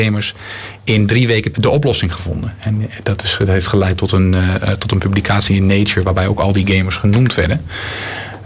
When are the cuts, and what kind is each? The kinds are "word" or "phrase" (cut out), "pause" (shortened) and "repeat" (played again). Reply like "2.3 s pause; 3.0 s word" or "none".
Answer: 1.5 s word